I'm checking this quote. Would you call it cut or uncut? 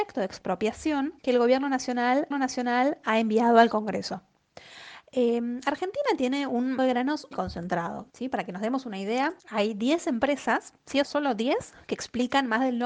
cut